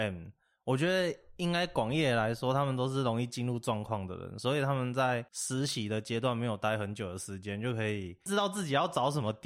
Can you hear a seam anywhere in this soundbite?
yes; 1 cut; at 5.3 s

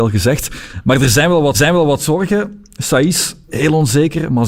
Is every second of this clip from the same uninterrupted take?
no; 2 cuts; at 1.5 s, 3.5 s

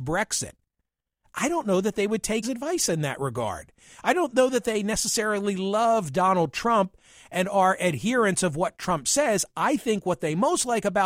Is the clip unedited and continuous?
no; 1 cut; at 2.4 s

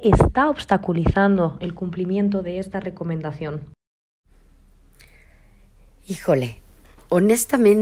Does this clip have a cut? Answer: no; 0 cuts

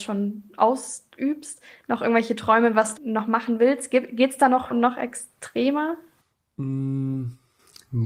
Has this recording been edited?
yes; 2 cuts; at 3.0 s, 4.7 s

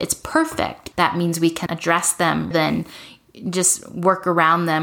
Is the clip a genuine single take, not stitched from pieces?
no; 3 cuts; at 0.9 s, 1.7 s, 2.5 s

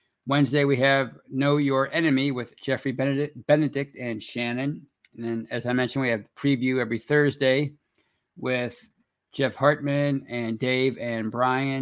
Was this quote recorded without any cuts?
yes; 0 cuts

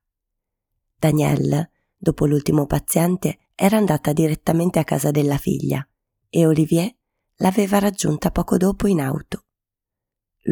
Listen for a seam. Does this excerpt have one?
yes; 1 cut; at 3.5 s

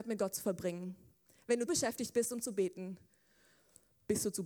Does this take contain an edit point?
yes; 1 cut; at 1.7 s

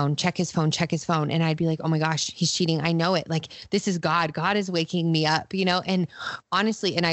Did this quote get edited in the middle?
no; 0 cuts

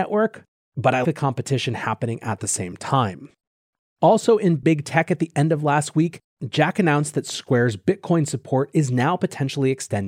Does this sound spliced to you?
yes; 1 cut; at 1.0 s

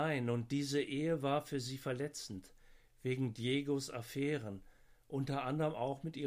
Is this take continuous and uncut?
yes; 0 cuts

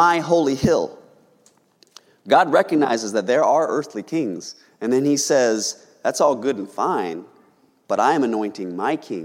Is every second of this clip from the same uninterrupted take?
yes; 0 cuts

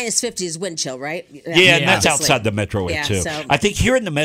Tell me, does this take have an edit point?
yes; 1 cut; at 2.9 s

